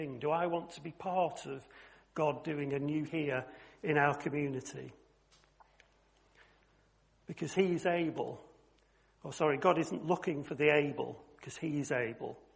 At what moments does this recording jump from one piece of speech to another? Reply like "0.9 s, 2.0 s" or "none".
3.1 s, 8.8 s